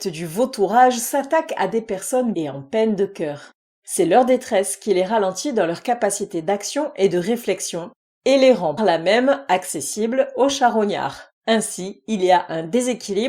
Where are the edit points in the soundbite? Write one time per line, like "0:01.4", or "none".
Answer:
0:02.3
0:08.8
0:11.4